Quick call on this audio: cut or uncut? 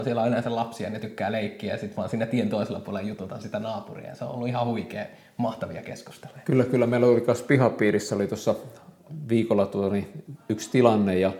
uncut